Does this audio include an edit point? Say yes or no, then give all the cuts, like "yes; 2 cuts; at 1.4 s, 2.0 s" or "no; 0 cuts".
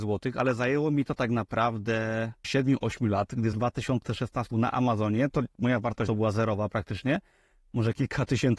yes; 4 cuts; at 2.4 s, 3.5 s, 4.5 s, 6.1 s